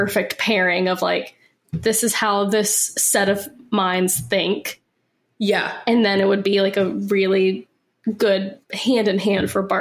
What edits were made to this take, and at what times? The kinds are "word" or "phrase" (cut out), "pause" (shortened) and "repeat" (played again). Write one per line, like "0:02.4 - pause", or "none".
none